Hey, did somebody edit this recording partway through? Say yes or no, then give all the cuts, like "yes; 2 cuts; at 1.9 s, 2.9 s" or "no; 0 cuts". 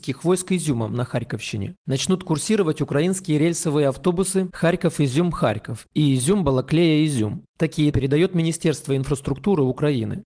yes; 1 cut; at 7.9 s